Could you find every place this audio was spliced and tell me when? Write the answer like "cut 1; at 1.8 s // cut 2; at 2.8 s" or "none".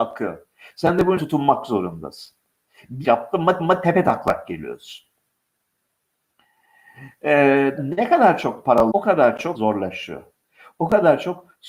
cut 1; at 1.2 s // cut 2; at 3.0 s // cut 3; at 3.6 s // cut 4; at 7.8 s // cut 5; at 8.9 s // cut 6; at 9.5 s